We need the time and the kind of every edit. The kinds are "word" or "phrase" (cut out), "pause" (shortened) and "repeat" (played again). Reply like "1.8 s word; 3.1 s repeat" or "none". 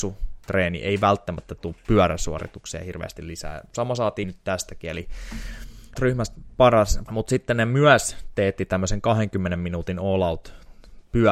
4.2 s word; 6.0 s word; 7.1 s phrase

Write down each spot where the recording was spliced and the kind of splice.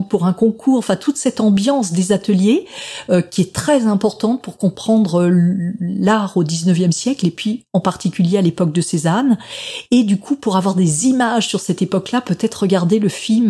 none

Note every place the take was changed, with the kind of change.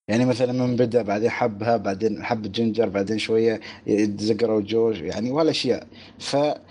none

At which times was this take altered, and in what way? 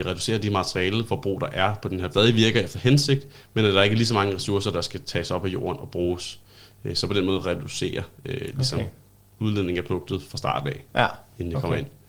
2.1 s phrase

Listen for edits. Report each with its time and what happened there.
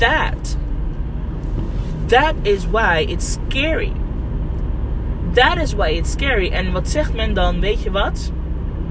none

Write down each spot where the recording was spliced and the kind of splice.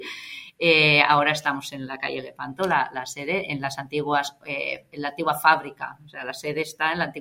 none

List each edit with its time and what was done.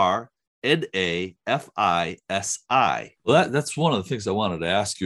3.2 s pause

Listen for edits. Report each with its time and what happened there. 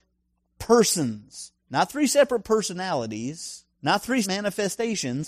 1.6 s pause; 3.7 s pause; 4.2 s word

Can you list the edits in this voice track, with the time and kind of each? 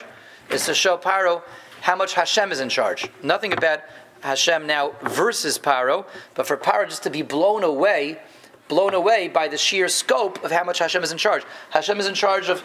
none

